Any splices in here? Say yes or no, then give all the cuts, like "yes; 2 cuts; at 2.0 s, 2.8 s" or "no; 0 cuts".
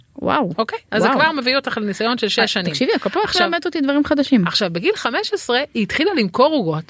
no; 0 cuts